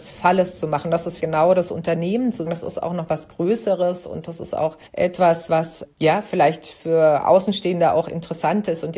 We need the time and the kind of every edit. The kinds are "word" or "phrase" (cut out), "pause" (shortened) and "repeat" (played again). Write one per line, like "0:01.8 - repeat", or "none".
0:01.2 - word
0:02.5 - word
0:04.9 - pause
0:05.9 - pause